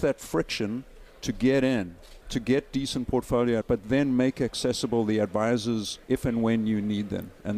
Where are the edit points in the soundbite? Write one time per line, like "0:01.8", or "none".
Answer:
0:01.1
0:02.2
0:03.6
0:06.0